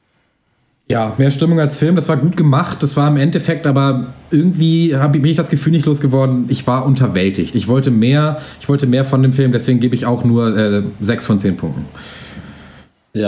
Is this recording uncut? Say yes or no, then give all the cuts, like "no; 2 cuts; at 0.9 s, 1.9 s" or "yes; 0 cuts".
yes; 0 cuts